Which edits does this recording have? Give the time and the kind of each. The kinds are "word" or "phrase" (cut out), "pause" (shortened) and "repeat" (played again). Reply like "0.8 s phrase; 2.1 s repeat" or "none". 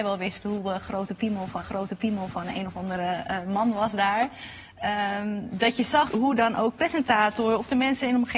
1.6 s repeat; 6.1 s word